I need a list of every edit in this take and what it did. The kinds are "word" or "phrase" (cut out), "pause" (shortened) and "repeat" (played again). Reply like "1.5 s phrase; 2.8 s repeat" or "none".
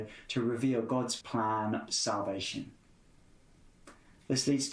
1.2 s word; 1.9 s word